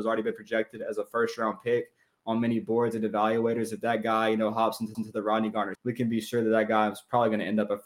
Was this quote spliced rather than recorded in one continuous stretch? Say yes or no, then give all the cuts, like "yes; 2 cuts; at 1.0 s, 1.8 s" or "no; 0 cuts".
yes; 2 cuts; at 4.9 s, 5.7 s